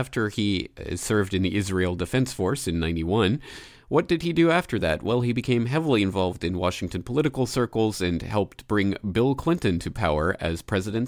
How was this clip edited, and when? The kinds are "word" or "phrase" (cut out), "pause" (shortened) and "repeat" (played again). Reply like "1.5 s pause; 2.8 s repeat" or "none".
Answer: none